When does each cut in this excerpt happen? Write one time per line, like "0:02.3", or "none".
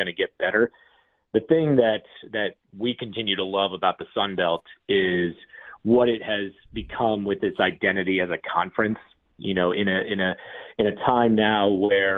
none